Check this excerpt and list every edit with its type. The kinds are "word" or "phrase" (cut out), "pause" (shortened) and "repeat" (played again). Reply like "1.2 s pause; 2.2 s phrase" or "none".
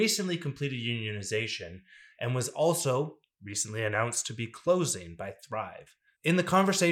none

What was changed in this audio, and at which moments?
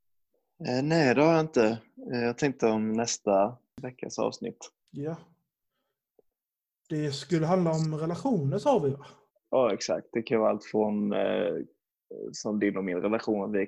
4.8 s pause; 9.3 s pause

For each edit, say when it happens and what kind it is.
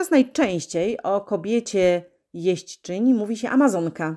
none

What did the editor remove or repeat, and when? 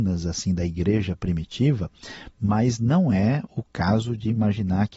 none

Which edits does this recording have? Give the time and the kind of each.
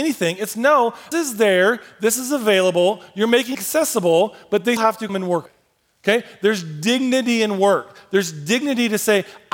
1.1 s word; 3.5 s word; 4.8 s word; 5.1 s word; 5.5 s word

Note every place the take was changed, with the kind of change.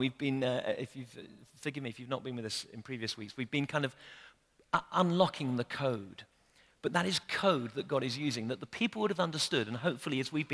none

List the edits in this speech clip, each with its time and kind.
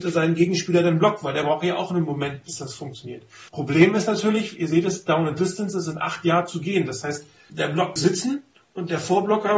3.5 s pause; 7.5 s word; 8.0 s word

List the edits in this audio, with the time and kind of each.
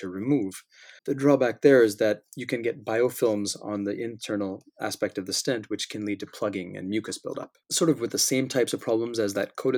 1.0 s pause; 7.6 s pause

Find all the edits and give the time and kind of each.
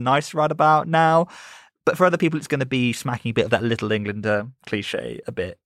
none

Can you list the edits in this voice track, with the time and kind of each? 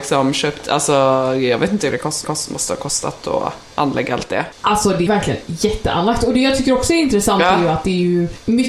1.9 s word; 2.2 s repeat; 5.1 s word

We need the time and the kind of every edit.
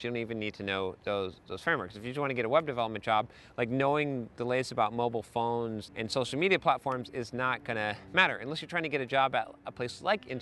5.9 s word

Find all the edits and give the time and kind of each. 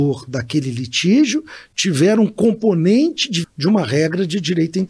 3.4 s word

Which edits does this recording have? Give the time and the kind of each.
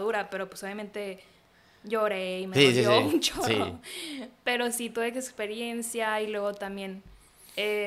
none

